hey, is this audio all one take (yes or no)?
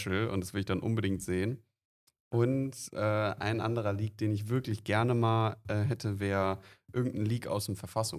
yes